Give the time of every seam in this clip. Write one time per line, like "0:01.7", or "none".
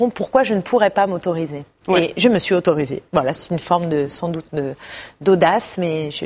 none

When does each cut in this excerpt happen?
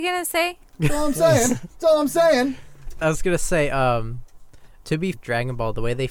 0:03.0
0:05.1

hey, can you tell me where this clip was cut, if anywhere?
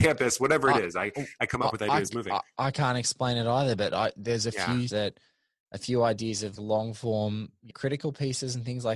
0:04.9
0:06.6
0:07.7

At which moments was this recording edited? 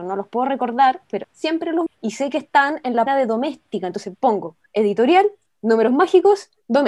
0:01.2
0:01.9
0:03.1
0:04.7

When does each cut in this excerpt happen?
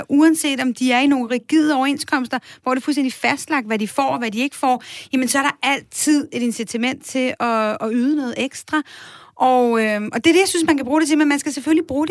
none

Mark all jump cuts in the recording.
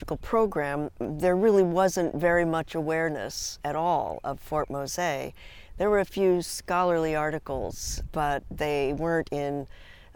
0:08.1

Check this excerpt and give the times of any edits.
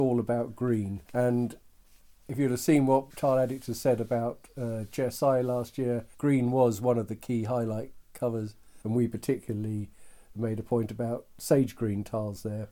0:01.1
0:03.1
0:06.1
0:08.8

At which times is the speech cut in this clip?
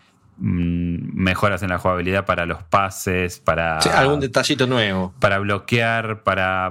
none

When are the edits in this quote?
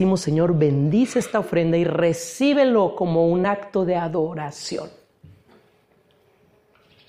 none

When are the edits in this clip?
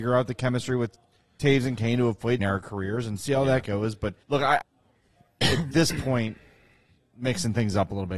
0:02.4
0:04.2
0:04.6

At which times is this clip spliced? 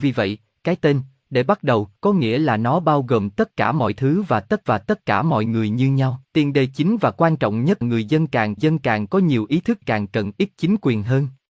0:02.0
0:04.7
0:06.3
0:07.8
0:08.6
0:09.8

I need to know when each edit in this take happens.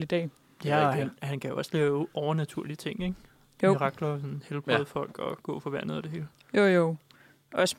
none

